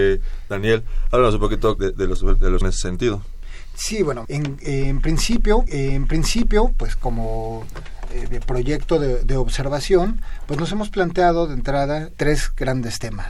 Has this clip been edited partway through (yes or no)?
yes